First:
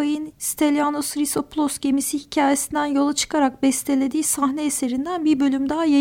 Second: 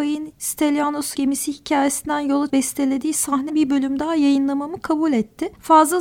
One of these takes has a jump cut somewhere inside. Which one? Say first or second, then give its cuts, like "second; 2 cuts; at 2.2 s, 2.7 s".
second; 3 cuts; at 1.1 s, 2.5 s, 3.5 s